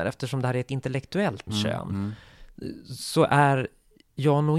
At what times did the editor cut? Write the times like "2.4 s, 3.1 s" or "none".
1.5 s